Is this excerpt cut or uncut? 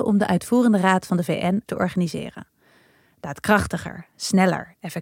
cut